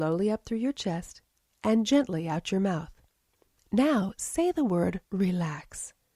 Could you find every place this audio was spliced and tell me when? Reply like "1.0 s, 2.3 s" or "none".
5.1 s